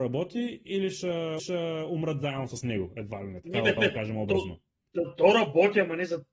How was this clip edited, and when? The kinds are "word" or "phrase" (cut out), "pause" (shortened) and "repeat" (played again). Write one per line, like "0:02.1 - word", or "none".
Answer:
0:01.4 - repeat
0:03.8 - repeat